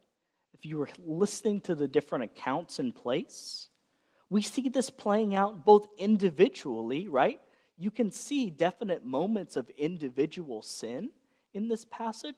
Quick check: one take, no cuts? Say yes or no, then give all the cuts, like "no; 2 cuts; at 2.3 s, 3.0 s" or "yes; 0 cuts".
yes; 0 cuts